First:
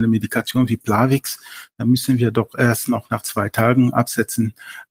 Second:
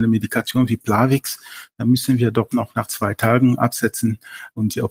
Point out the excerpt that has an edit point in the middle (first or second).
second